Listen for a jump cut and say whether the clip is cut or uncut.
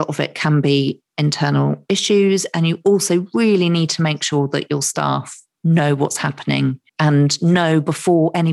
cut